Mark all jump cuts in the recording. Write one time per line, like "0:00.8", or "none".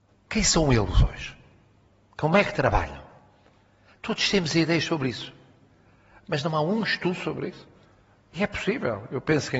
none